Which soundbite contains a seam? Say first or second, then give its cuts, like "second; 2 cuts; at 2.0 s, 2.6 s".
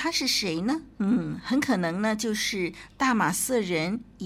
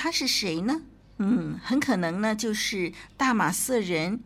first; 1 cut; at 0.9 s